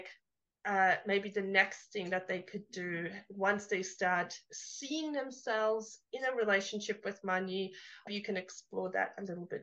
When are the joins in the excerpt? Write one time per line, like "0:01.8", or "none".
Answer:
0:08.1

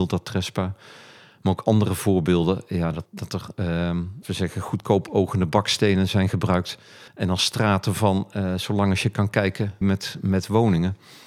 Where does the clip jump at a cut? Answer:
0:03.1
0:04.2
0:07.1
0:09.8

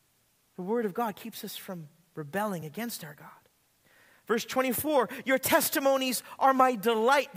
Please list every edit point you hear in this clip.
none

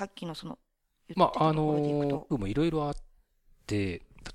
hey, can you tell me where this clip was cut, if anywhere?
0:02.3

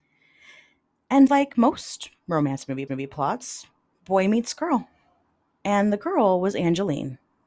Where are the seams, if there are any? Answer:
0:01.3
0:02.9

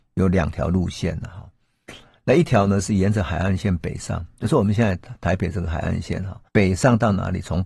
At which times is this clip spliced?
0:06.5

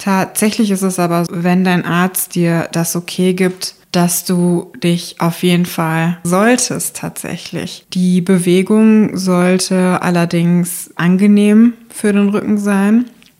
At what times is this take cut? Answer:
0:01.3
0:06.2
0:11.0

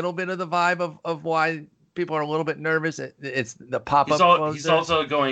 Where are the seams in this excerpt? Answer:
none

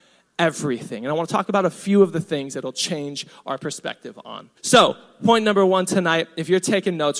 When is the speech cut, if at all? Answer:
0:04.6

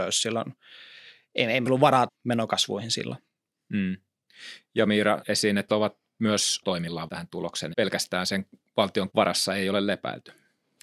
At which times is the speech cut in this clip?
0:01.7
0:02.1
0:05.2
0:05.7
0:06.6
0:07.1
0:07.7
0:09.1

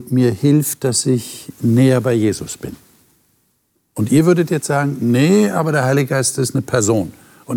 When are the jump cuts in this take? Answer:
none

